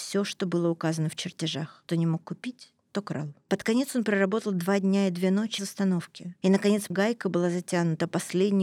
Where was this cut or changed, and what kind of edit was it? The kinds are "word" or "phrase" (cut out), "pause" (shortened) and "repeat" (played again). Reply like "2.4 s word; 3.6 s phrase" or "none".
1.9 s word; 5.6 s word; 6.9 s word